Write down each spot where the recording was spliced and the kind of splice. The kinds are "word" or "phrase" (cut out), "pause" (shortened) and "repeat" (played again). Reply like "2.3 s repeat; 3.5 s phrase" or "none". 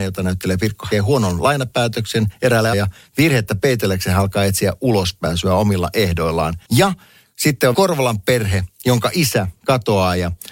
0.9 s phrase; 2.7 s word; 6.6 s pause; 7.7 s phrase